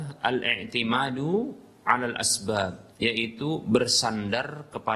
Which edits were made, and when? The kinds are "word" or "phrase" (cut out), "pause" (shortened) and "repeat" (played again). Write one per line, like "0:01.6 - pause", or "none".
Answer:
0:02.9 - pause